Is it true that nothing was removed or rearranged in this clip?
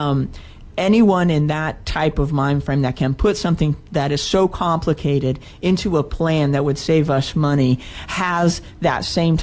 yes; 0 cuts

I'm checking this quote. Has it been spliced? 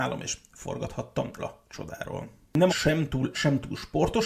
yes; 3 cuts; at 1.4 s, 2.7 s, 3.3 s

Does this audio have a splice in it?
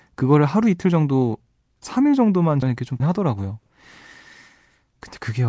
yes; 3 cuts; at 1.8 s, 2.6 s, 3.0 s

